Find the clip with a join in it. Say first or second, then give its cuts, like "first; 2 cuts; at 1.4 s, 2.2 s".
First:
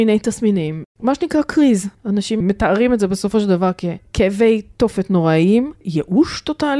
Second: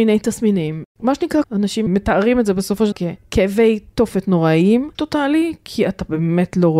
second; 3 cuts; at 1.4 s, 2.9 s, 4.9 s